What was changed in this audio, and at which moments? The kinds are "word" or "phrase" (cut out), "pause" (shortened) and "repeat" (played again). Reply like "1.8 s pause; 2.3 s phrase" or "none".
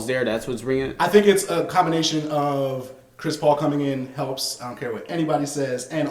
none